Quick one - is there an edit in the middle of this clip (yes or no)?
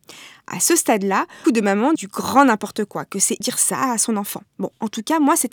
yes